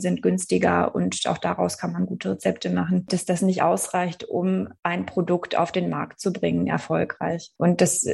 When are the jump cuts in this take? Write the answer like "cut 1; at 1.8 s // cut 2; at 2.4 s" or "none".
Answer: cut 1; at 4.8 s